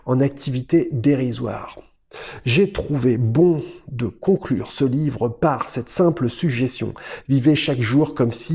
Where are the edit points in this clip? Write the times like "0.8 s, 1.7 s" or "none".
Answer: none